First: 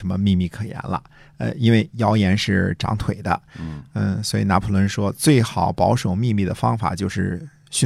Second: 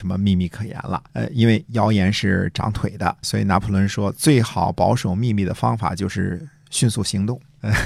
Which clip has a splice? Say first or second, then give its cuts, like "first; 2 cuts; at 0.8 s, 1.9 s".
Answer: second; 2 cuts; at 1.1 s, 3.2 s